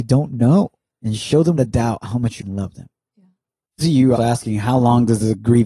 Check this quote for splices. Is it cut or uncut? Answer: cut